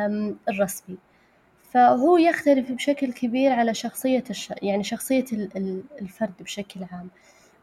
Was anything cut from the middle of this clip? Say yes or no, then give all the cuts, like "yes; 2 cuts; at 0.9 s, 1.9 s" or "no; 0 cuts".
no; 0 cuts